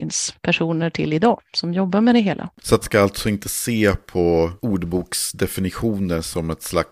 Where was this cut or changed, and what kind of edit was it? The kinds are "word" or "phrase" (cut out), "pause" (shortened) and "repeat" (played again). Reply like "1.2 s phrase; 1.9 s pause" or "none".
2.8 s word